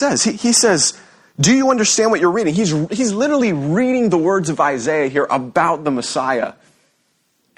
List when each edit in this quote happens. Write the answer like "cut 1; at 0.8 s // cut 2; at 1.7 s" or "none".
none